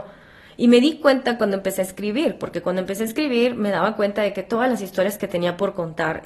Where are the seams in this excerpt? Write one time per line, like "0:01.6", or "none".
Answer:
none